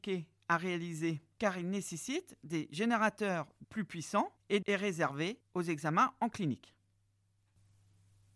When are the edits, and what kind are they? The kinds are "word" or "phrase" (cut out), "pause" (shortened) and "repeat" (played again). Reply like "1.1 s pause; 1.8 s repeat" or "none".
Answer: 3.6 s word; 4.6 s word

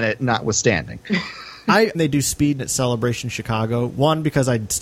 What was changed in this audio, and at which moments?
1.9 s phrase; 2.6 s word

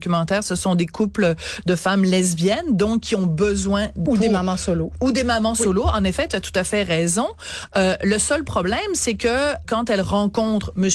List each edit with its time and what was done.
4.1 s word; 9.6 s word

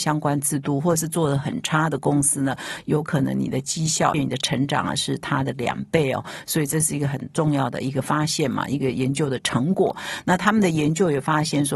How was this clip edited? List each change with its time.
4.1 s phrase

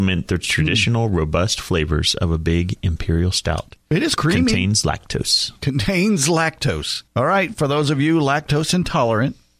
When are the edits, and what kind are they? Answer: 4.2 s word; 7.1 s pause

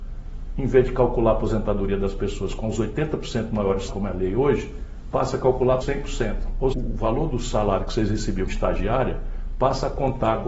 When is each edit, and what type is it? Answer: 3.9 s word; 5.8 s word; 6.7 s word; 8.5 s word

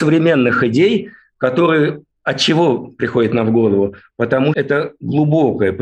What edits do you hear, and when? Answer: 4.5 s word

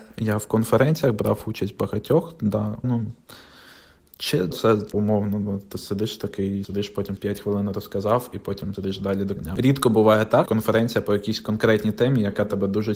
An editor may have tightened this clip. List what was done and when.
2.8 s word; 4.5 s word; 4.9 s word; 6.6 s word; 7.2 s word; 8.7 s word; 9.4 s word; 10.5 s word

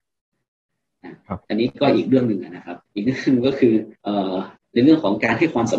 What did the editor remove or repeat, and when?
2.9 s pause; 4.0 s pause; 4.6 s pause

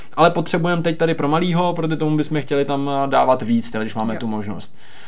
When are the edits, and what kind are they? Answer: none

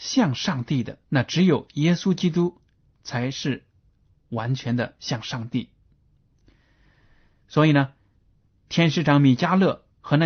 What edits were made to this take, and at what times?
1.0 s pause

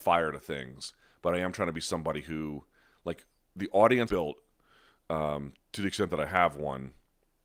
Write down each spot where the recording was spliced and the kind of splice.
4.1 s word

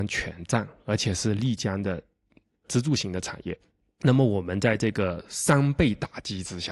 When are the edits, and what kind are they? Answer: none

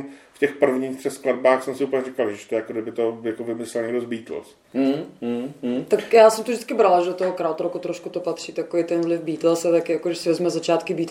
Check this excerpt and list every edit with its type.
4.6 s pause

